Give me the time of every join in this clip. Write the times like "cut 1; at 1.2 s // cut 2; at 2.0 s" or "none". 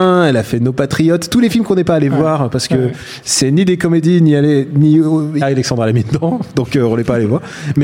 cut 1; at 5.4 s